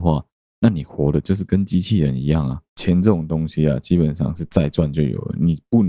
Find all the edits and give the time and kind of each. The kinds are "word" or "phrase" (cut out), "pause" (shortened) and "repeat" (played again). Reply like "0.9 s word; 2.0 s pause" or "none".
2.7 s pause

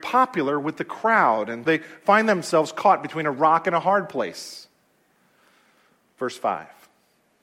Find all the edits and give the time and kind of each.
1.6 s word

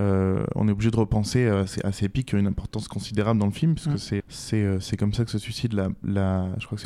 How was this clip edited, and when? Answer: 4.2 s word

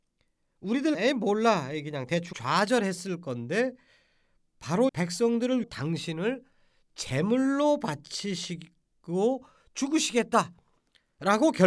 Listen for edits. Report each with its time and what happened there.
0.9 s word; 2.3 s word; 4.9 s word; 5.6 s word

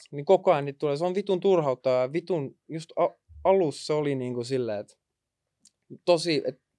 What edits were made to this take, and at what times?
none

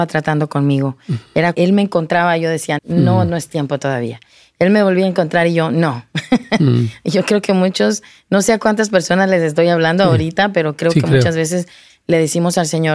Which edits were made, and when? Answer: 1.5 s word; 2.8 s word

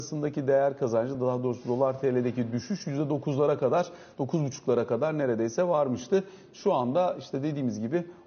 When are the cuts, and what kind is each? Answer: none

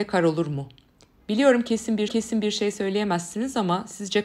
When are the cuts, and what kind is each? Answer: 2.1 s repeat

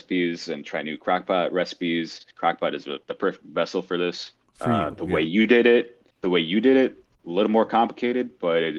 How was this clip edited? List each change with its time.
3.0 s pause; 4.5 s pause; 6.1 s pause

